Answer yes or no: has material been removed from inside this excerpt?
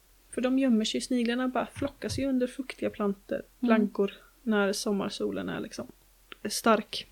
no